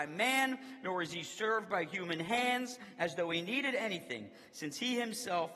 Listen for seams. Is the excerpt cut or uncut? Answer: uncut